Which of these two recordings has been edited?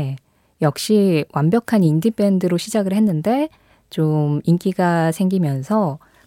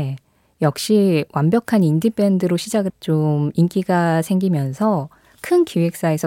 second; 1 cut; at 2.9 s

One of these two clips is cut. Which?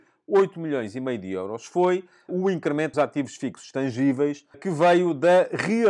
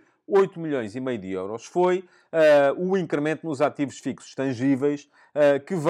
first; 3 cuts; at 2.3 s, 2.9 s, 4.5 s

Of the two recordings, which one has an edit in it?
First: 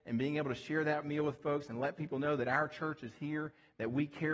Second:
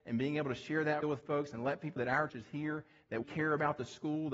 second; 4 cuts; at 1.0 s, 2.0 s, 2.3 s, 3.2 s

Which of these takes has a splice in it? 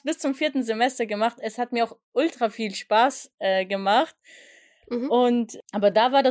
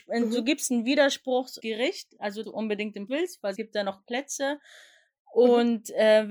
second; 4 cuts; at 1.6 s, 2.4 s, 3.1 s, 3.5 s

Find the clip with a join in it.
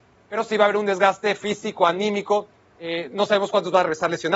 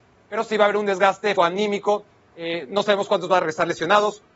second; 1 cut; at 1.4 s

